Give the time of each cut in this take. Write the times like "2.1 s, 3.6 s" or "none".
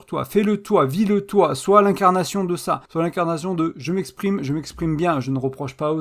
2.9 s

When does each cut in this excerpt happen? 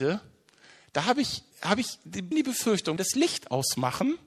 1.5 s, 2.3 s, 3.0 s

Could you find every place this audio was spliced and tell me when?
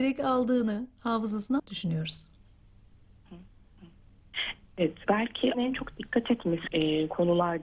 1.6 s, 5.1 s, 5.5 s, 6.7 s

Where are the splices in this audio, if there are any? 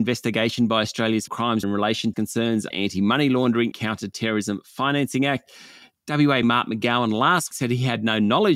1.3 s, 1.6 s, 2.1 s, 2.7 s, 3.7 s, 6.4 s, 7.5 s

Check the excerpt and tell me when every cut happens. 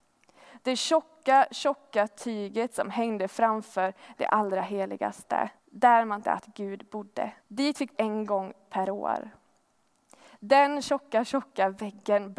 5.6 s, 6.2 s, 7.4 s, 7.9 s

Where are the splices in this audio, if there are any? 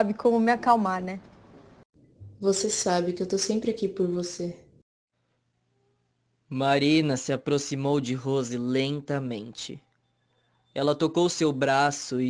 none

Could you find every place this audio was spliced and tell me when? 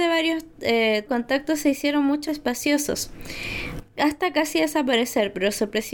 1.1 s, 2.3 s

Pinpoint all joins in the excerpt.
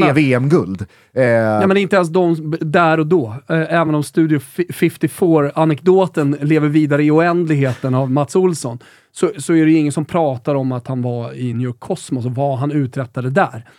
none

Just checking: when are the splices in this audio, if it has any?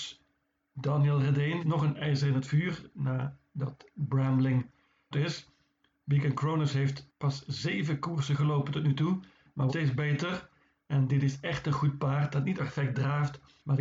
1.6 s, 5.1 s, 9.7 s, 12.6 s

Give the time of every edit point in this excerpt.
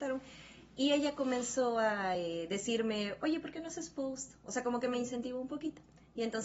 none

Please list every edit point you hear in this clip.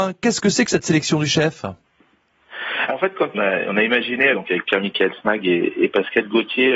2.9 s, 3.3 s, 4.3 s

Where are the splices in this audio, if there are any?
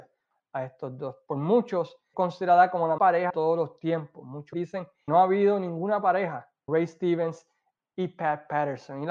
2.1 s, 3.0 s, 3.3 s, 4.5 s, 5.1 s, 6.7 s

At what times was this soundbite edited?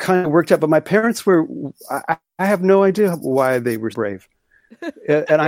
3.9 s

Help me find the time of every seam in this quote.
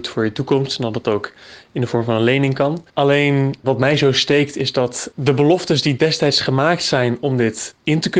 2.9 s

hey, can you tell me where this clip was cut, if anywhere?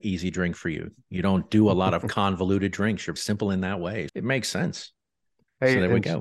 3.2 s, 4.1 s

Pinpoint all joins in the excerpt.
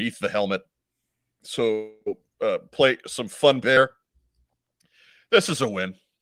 3.6 s

